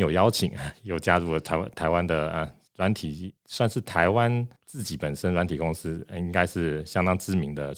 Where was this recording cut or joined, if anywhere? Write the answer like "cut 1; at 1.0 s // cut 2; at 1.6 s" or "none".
cut 1; at 2.7 s // cut 2; at 3.4 s // cut 3; at 4.6 s